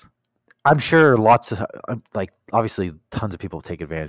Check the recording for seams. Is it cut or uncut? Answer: uncut